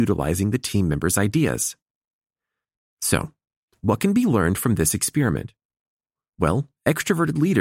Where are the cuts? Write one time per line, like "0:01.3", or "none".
none